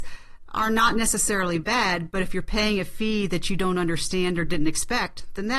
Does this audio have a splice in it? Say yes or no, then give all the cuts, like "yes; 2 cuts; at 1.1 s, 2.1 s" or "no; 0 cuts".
no; 0 cuts